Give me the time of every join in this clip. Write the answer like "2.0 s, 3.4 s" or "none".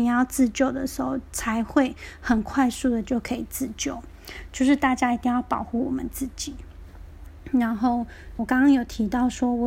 8.4 s